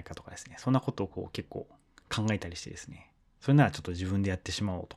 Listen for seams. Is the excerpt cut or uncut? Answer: uncut